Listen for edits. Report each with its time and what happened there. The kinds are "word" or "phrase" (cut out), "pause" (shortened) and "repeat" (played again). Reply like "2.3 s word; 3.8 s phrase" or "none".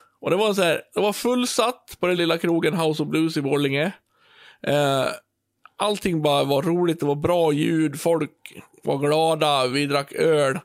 2.2 s word